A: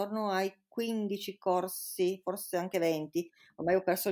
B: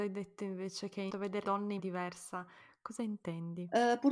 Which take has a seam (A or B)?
B